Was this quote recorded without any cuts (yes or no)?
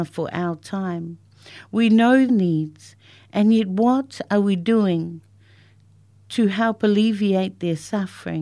no